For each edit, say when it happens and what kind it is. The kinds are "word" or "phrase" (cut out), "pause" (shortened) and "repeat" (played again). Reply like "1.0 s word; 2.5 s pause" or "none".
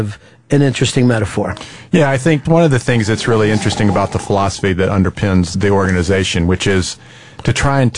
2.4 s word; 5.5 s word